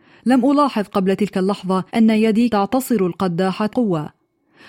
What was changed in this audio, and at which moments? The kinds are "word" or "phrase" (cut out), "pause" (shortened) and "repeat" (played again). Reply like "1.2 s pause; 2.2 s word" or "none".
1.9 s pause; 2.5 s word; 3.7 s word